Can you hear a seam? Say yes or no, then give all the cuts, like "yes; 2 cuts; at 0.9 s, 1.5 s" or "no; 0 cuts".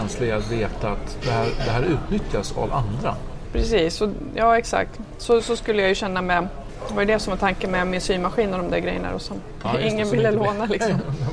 no; 0 cuts